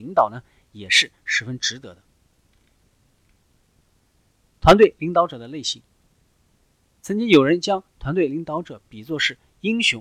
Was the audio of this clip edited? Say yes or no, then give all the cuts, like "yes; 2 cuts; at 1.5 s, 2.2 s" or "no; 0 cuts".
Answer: no; 0 cuts